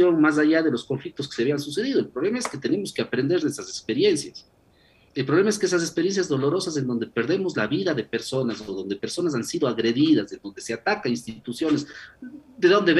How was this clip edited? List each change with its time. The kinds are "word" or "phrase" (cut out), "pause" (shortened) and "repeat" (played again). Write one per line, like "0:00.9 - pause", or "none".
none